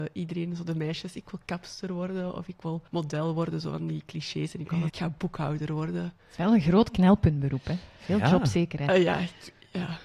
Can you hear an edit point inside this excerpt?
yes; 2 cuts; at 2.9 s, 4.9 s

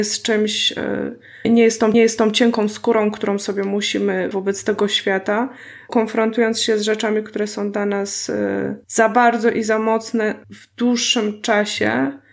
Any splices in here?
yes; 6 cuts; at 1.4 s, 1.9 s, 4.3 s, 5.9 s, 8.8 s, 10.4 s

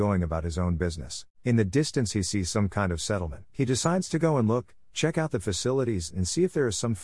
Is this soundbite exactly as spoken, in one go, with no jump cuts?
no; 2 cuts; at 1.3 s, 3.5 s

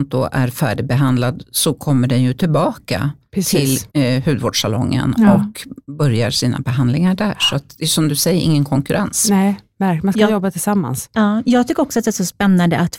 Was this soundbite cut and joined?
yes; 1 cut; at 3.9 s

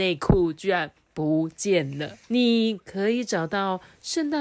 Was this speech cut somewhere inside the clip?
yes; 1 cut; at 2.2 s

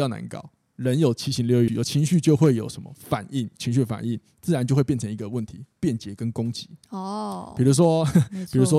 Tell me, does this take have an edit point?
yes; 2 cuts; at 1.7 s, 6.8 s

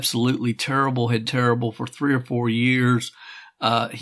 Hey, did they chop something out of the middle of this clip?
yes; 1 cut; at 1.2 s

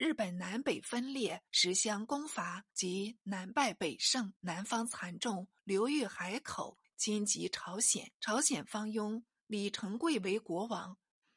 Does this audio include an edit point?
yes; 6 cuts; at 1.5 s, 2.7 s, 4.4 s, 5.6 s, 6.8 s, 8.2 s

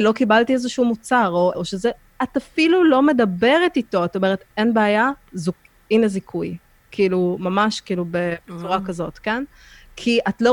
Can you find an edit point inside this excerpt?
yes; 1 cut; at 1.5 s

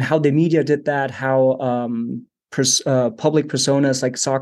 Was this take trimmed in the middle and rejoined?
no; 0 cuts

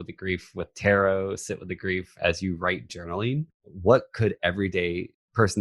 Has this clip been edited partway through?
yes; 1 cut; at 2.9 s

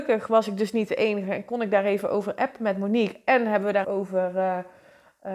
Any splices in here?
yes; 1 cut; at 3.8 s

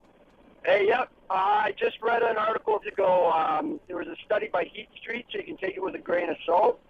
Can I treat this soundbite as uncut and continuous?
no; 1 cut; at 2.8 s

